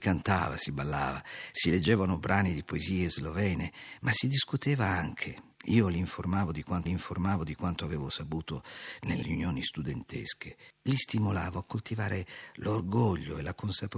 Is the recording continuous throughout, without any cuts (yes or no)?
no